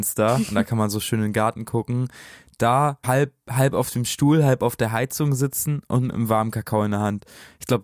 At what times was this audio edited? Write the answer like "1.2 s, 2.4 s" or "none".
3.0 s